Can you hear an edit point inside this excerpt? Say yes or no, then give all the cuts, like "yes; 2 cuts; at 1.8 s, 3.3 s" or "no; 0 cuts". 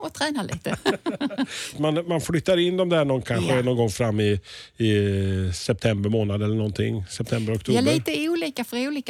yes; 1 cut; at 1.7 s